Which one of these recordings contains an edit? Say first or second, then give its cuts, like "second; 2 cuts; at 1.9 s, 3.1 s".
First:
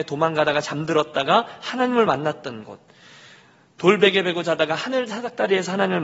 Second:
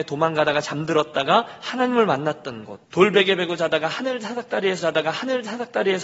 second; 2 cuts; at 2.8 s, 4.8 s